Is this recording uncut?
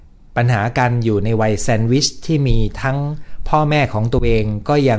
yes; 0 cuts

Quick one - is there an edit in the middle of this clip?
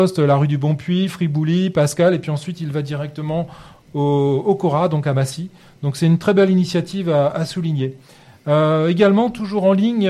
no; 0 cuts

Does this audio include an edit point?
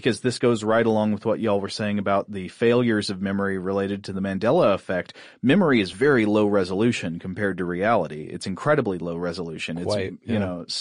no; 0 cuts

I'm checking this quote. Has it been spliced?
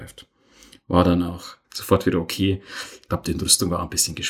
yes; 1 cut; at 1.6 s

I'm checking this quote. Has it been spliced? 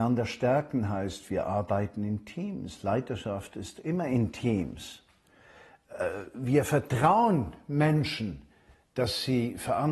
no; 0 cuts

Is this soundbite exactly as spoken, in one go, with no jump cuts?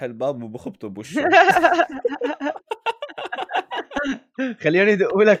yes; 0 cuts

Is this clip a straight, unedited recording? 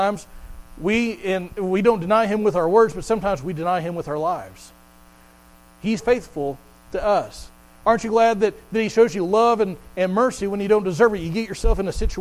no; 1 cut; at 6.0 s

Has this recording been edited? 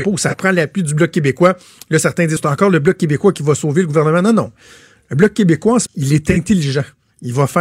yes; 2 cuts; at 2.4 s, 5.9 s

